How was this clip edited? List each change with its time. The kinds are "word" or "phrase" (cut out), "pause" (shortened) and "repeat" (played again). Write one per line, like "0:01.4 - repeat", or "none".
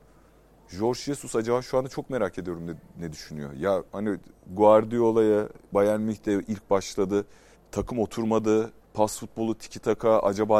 0:03.9 - pause
0:05.7 - pause
0:07.5 - pause
0:08.8 - pause